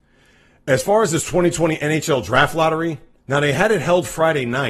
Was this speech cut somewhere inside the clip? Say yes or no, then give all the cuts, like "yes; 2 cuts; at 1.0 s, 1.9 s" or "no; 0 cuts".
yes; 1 cut; at 3.2 s